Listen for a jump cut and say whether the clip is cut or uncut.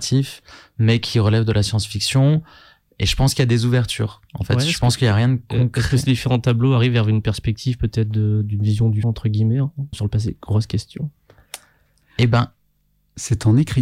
cut